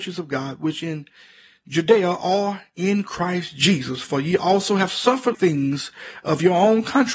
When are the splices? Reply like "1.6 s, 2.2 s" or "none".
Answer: 5.3 s